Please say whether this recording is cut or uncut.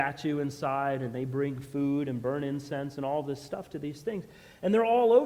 uncut